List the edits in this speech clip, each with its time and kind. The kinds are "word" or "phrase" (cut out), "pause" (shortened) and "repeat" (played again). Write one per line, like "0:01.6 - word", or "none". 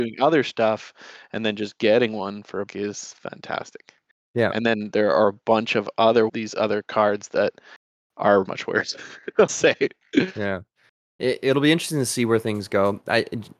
0:02.7 - word
0:06.3 - word
0:08.4 - word
0:09.5 - word